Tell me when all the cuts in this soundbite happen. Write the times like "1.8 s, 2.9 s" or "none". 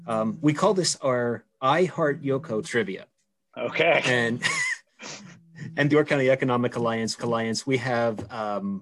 2.6 s, 4.9 s, 5.9 s, 7.2 s